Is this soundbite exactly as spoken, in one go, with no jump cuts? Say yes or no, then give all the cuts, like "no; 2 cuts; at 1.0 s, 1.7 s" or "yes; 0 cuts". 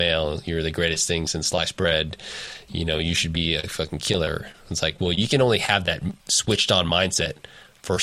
no; 1 cut; at 6.2 s